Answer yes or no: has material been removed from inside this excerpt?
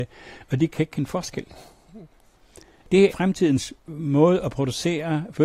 yes